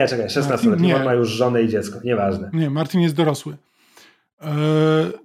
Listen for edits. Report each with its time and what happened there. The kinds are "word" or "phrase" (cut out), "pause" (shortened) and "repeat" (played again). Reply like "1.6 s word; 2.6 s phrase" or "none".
none